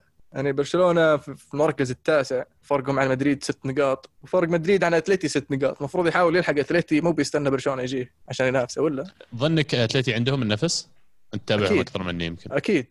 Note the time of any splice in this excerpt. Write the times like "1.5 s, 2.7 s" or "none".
2.6 s, 4.2 s, 8.2 s